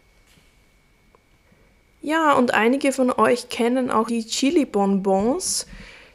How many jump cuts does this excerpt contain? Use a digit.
1